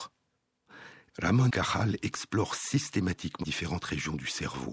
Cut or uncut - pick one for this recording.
cut